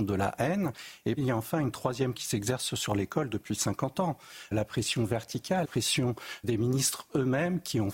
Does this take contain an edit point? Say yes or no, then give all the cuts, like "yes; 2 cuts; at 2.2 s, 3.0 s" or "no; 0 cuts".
yes; 5 cuts; at 1.2 s, 2.1 s, 4.5 s, 5.6 s, 6.4 s